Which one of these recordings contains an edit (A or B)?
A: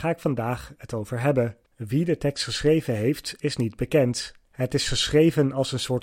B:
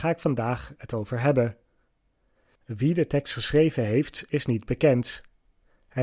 A